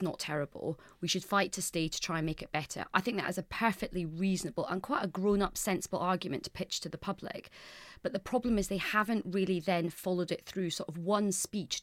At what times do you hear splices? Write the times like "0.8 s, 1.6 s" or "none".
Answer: none